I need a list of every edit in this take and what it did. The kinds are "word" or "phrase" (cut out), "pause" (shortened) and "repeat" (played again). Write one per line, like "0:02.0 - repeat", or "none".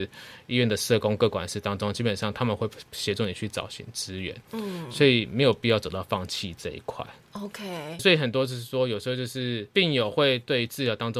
0:08.0 - word
0:09.7 - pause